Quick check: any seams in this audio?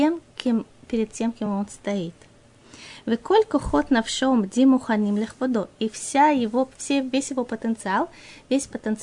no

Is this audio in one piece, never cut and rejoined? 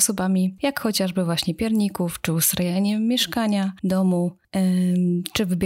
no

